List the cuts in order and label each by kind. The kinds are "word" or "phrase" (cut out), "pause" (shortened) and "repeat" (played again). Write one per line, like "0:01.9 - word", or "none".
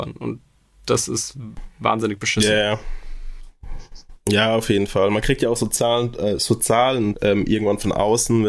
0:07.1 - word